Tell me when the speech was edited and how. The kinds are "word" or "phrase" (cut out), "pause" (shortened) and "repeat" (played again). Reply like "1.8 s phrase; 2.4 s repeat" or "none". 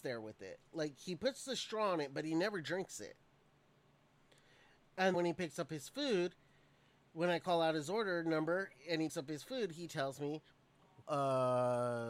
5.1 s word; 9.1 s word; 11.0 s word